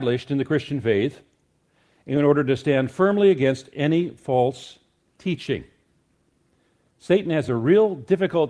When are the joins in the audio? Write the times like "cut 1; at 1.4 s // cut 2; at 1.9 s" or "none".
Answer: none